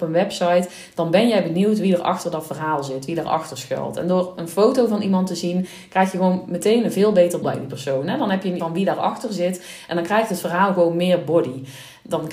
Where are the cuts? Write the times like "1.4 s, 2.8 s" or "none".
7.4 s, 8.6 s